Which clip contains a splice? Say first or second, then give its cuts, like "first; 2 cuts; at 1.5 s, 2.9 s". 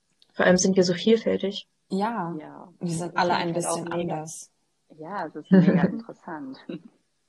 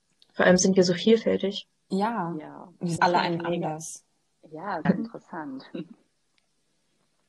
second; 3 cuts; at 3.0 s, 3.4 s, 4.9 s